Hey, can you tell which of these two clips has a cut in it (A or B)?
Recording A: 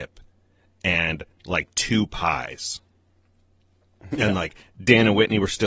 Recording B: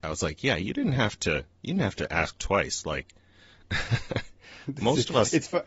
B